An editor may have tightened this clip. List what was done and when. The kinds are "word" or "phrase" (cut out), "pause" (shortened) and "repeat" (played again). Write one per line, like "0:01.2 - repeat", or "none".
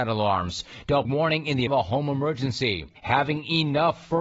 0:01.0 - phrase
0:01.7 - word
0:03.0 - pause

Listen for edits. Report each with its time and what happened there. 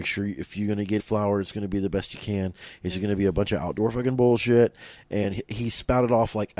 0:01.0 - word

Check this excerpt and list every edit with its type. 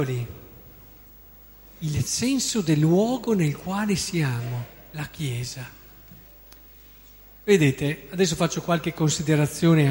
none

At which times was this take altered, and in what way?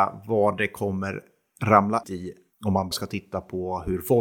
0:02.0 - word
0:02.9 - word

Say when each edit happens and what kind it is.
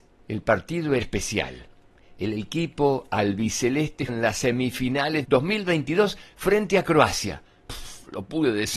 0:01.0 - word
0:01.9 - pause
0:04.1 - word
0:05.2 - phrase

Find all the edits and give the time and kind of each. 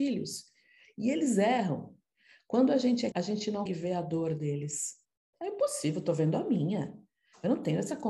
0:03.1 - word
0:03.7 - word

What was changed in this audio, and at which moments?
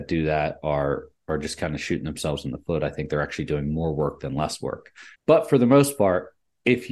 0:05.1 - pause

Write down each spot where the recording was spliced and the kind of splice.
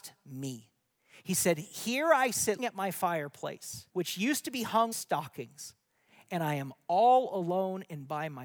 0:02.6 - word
0:03.9 - pause
0:04.9 - word

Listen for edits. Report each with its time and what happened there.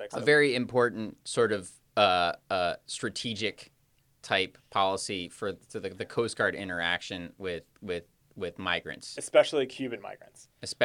none

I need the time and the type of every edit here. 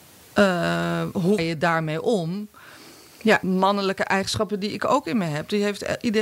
0:01.4 - word
0:03.4 - phrase

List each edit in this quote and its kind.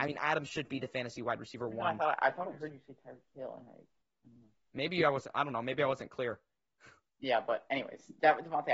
none

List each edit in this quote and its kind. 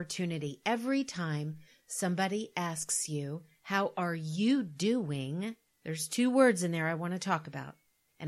none

